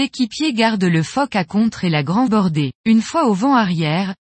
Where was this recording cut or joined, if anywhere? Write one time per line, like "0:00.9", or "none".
0:02.3
0:02.8